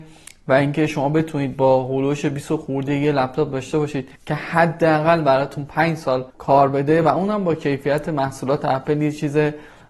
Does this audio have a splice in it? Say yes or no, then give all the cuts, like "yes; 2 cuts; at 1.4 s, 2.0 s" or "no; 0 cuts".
yes; 2 cuts; at 4.1 s, 6.3 s